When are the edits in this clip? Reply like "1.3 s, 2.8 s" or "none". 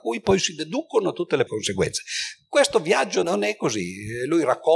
1.5 s, 3.2 s